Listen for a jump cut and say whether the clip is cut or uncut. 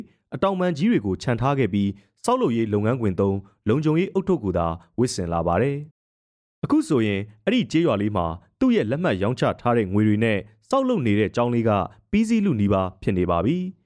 cut